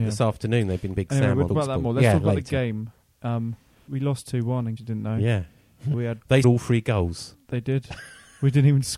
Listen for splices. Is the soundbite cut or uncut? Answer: cut